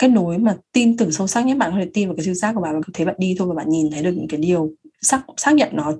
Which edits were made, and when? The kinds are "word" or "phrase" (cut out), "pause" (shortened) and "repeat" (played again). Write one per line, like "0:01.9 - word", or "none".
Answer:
0:02.8 - word